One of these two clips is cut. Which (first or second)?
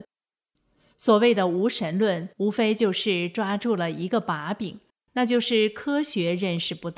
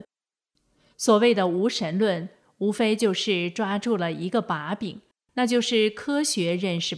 first